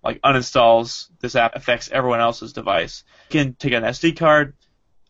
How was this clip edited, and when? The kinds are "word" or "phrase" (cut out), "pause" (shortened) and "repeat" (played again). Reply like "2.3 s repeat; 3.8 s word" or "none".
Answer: 1.5 s word; 3.3 s word